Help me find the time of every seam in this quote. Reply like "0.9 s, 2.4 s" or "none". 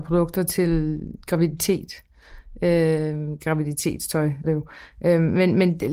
4.4 s